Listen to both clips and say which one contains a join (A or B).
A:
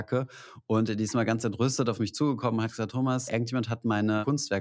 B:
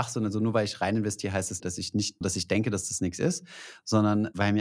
B